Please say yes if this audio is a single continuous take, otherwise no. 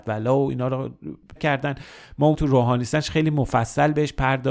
no